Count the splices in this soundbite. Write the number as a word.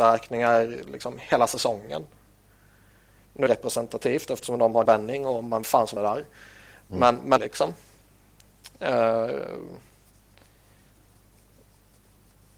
five